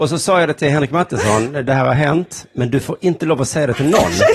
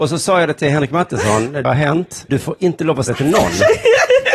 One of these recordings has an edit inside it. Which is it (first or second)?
second